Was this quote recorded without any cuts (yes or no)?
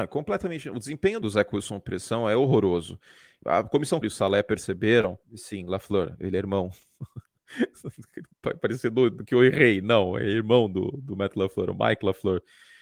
no